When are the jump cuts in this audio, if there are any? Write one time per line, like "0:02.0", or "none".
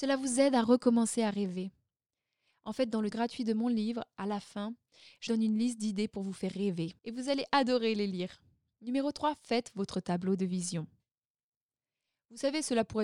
0:03.1
0:05.3
0:07.0